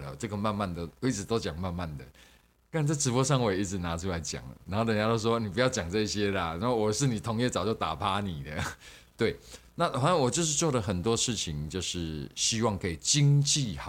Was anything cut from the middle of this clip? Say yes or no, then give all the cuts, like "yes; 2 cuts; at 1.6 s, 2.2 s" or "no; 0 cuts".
no; 0 cuts